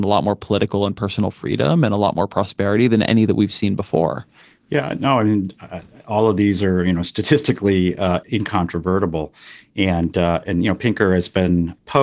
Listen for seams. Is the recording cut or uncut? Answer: uncut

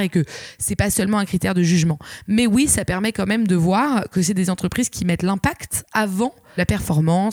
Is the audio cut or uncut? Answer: uncut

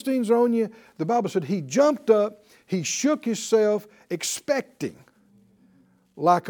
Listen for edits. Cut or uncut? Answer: uncut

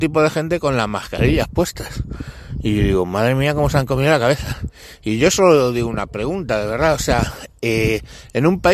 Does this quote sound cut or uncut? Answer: uncut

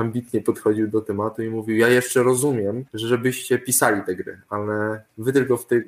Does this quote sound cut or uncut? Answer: cut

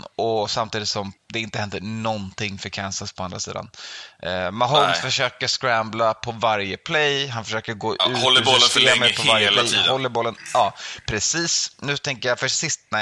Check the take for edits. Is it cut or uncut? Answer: cut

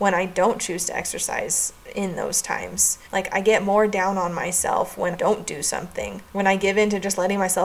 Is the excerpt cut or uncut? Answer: cut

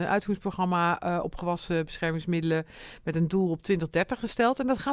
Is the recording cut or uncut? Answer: uncut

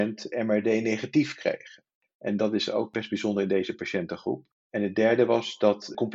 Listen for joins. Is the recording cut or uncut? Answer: uncut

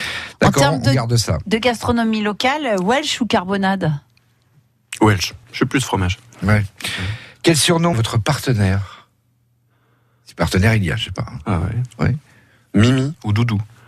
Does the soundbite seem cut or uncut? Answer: cut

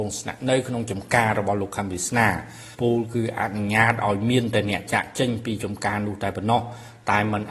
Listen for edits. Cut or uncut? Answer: cut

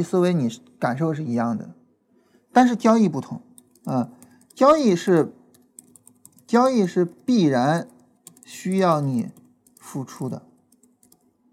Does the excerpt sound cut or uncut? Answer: cut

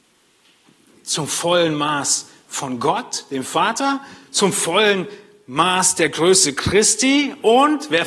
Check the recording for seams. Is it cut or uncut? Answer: uncut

